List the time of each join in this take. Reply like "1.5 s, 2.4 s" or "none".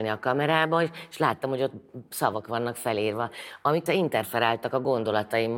3.9 s